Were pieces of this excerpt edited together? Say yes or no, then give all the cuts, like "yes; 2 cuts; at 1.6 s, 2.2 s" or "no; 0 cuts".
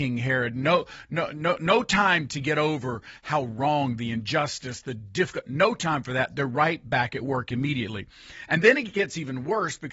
no; 0 cuts